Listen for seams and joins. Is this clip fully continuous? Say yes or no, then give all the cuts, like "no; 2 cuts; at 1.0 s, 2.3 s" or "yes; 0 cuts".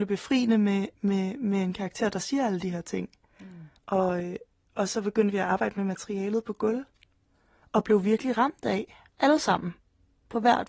no; 1 cut; at 3.8 s